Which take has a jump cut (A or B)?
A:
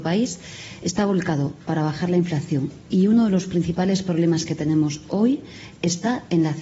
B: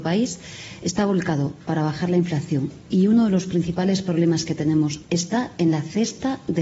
B